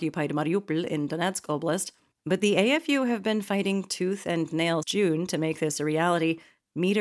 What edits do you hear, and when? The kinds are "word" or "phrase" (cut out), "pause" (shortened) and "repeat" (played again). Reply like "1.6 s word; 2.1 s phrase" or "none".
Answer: 4.8 s word